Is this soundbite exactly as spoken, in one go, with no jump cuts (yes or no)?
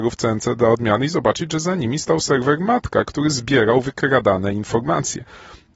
yes